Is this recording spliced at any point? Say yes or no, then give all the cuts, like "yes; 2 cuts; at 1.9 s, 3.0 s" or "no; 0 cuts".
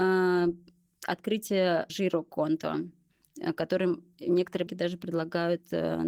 yes; 2 cuts; at 1.9 s, 4.7 s